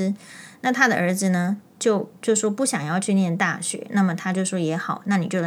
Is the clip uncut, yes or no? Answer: no